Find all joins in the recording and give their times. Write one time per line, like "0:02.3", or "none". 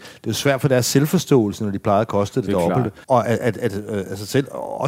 0:03.0